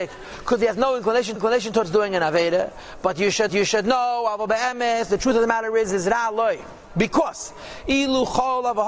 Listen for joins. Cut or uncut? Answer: cut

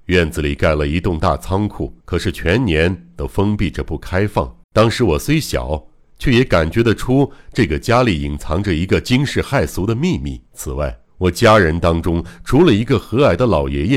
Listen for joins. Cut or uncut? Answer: cut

